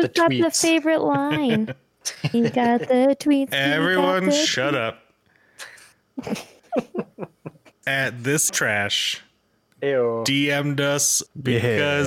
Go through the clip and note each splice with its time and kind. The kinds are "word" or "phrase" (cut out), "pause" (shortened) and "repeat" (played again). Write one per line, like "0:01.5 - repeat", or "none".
0:02.3 - word
0:07.8 - word
0:08.5 - word